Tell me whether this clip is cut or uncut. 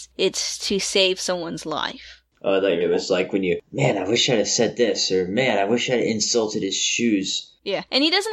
cut